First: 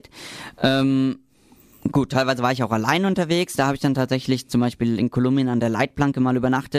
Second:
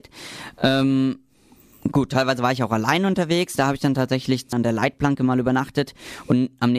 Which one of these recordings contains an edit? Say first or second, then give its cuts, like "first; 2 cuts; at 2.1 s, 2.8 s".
second; 1 cut; at 4.5 s